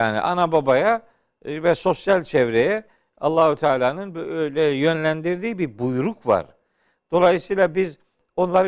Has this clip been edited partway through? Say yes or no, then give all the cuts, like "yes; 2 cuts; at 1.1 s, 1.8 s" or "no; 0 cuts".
no; 0 cuts